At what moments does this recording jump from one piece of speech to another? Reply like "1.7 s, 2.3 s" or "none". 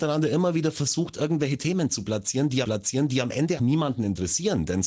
2.6 s, 3.6 s